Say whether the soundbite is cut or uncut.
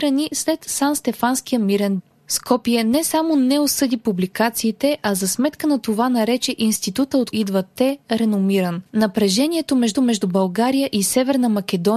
cut